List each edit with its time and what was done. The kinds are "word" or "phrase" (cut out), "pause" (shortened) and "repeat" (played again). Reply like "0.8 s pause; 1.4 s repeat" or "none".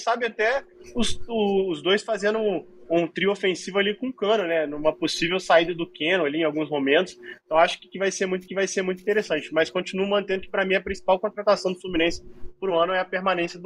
8.5 s repeat